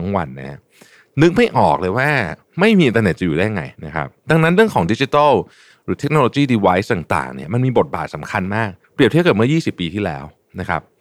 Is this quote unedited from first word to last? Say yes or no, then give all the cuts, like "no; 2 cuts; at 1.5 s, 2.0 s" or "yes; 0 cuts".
no; 3 cuts; at 3.7 s, 4.2 s, 8.8 s